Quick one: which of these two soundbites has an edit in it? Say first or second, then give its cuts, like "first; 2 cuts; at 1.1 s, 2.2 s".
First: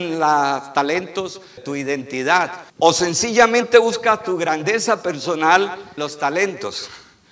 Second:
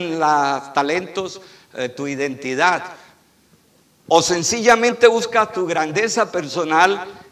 first; 3 cuts; at 1.6 s, 2.7 s, 6.0 s